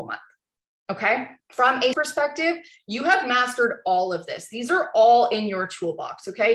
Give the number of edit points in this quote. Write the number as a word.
two